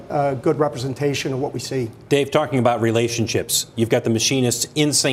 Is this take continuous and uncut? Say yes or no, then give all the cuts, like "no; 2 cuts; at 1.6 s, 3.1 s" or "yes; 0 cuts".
yes; 0 cuts